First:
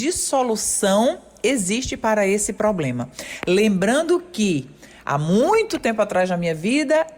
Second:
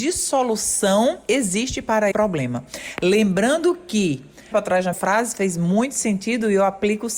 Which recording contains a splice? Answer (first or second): second